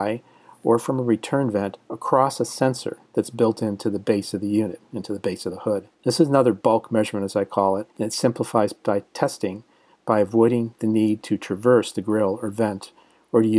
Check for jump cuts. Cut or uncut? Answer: cut